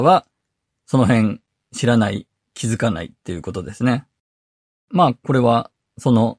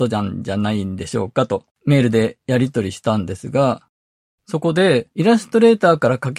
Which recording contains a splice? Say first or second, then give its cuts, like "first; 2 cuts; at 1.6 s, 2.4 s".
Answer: second; 2 cuts; at 1.7 s, 5.1 s